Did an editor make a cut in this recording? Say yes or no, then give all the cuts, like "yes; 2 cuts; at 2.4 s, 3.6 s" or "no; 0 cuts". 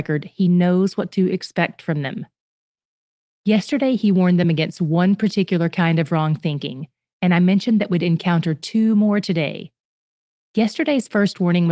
no; 0 cuts